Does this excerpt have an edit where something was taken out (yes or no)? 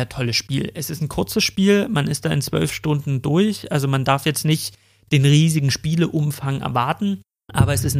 no